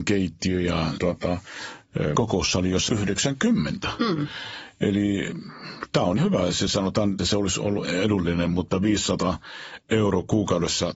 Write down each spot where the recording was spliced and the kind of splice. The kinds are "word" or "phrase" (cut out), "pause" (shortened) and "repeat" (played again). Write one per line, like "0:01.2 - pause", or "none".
0:01.0 - word
0:02.1 - word
0:02.9 - word
0:06.2 - word
0:07.2 - word
0:07.8 - word